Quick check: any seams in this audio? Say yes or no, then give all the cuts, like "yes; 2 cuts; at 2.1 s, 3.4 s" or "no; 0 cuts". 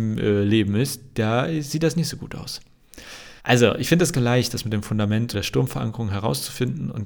yes; 3 cuts; at 3.4 s, 4.1 s, 5.3 s